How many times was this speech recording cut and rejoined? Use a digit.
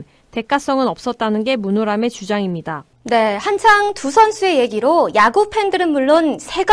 1